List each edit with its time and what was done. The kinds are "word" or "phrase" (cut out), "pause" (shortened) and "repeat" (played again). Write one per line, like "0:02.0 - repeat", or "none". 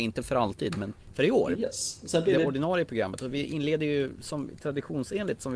none